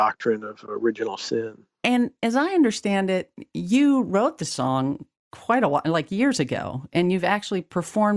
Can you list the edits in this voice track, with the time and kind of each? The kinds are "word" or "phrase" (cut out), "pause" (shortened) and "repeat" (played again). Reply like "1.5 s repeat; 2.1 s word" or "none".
none